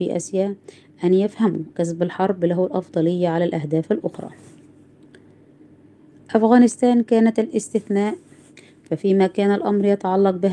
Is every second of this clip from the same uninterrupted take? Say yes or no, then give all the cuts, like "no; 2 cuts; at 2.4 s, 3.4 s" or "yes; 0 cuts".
no; 1 cut; at 1.7 s